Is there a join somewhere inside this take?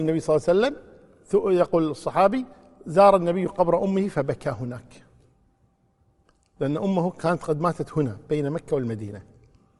no; 0 cuts

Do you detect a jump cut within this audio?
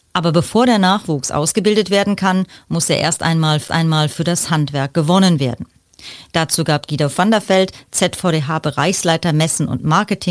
yes; 1 cut; at 3.7 s

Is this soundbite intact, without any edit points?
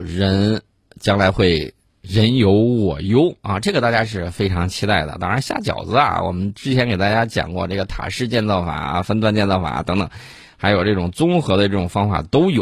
yes; 0 cuts

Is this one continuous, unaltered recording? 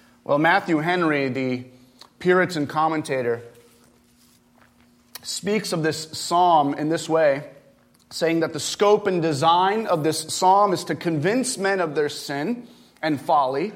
yes; 0 cuts

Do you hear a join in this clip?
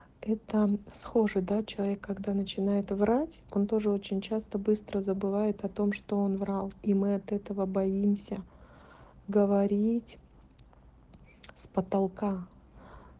no; 0 cuts

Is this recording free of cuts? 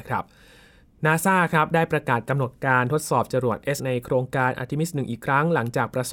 no; 1 cut; at 3.8 s

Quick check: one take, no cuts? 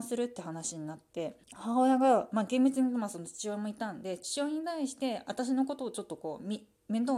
no; 1 cut; at 1.4 s

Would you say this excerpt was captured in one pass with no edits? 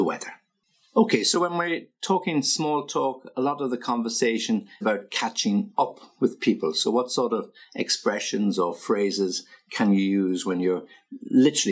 no; 1 cut; at 4.8 s

